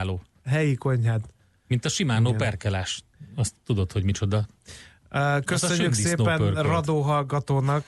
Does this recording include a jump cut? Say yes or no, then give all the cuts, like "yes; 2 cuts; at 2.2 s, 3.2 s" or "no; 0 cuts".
no; 0 cuts